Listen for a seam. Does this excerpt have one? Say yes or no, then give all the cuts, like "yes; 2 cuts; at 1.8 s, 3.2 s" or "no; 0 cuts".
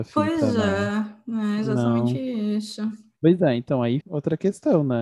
yes; 2 cuts; at 3.2 s, 4.0 s